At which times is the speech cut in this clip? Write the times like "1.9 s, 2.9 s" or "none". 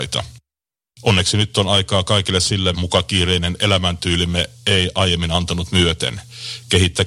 2.7 s